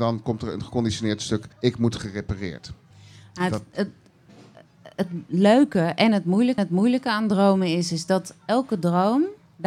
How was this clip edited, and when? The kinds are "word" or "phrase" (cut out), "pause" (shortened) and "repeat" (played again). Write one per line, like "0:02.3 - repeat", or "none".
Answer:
0:01.5 - pause
0:02.9 - pause
0:06.6 - repeat